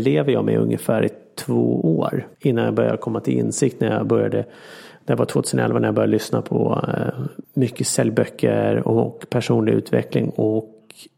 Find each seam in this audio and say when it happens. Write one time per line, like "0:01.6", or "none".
0:02.3
0:07.4